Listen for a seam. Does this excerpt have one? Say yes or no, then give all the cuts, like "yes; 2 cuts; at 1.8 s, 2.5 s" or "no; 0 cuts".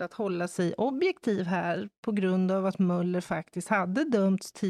no; 0 cuts